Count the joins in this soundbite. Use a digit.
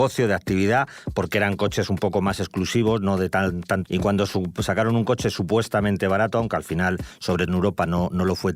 2